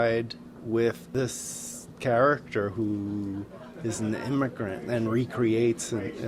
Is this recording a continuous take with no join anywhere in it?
yes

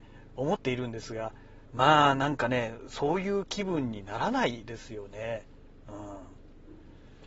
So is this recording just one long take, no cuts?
no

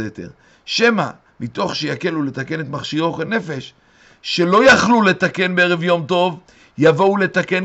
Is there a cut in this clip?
no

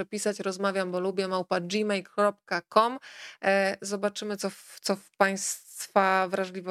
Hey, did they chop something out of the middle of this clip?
no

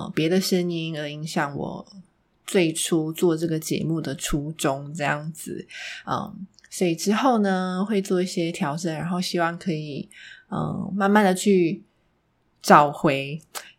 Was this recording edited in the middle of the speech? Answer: no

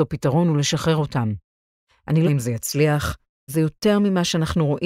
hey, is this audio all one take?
no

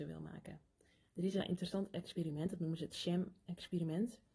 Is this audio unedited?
no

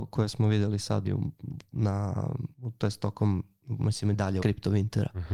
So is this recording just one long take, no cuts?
no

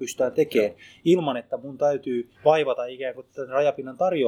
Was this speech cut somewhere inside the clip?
yes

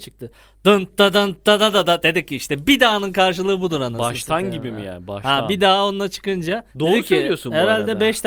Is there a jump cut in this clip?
yes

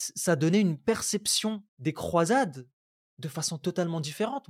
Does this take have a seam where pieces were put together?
yes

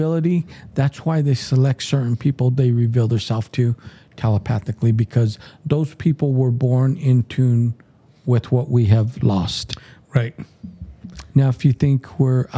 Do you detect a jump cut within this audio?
no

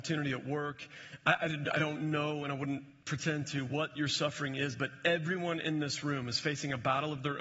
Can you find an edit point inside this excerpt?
no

